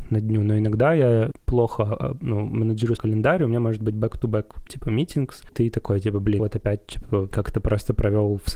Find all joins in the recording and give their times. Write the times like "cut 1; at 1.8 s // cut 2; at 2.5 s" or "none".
cut 1; at 1.3 s // cut 2; at 3.0 s // cut 3; at 4.7 s // cut 4; at 5.5 s // cut 5; at 6.4 s // cut 6; at 7.3 s